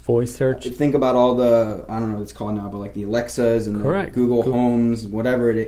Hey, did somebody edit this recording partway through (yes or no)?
no